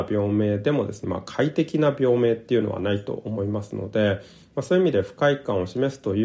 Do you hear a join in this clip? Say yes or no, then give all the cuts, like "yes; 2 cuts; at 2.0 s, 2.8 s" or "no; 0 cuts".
yes; 1 cut; at 1.0 s